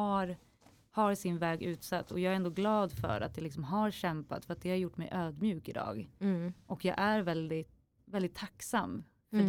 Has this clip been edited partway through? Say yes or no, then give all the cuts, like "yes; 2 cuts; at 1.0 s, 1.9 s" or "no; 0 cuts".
yes; 1 cut; at 8.0 s